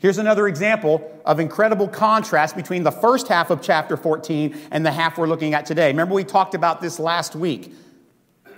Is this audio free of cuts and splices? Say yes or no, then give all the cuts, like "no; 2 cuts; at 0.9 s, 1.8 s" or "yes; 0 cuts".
yes; 0 cuts